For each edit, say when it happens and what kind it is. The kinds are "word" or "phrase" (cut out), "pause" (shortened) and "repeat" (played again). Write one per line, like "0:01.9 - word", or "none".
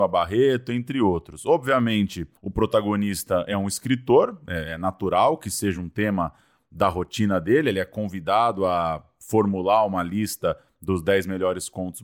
none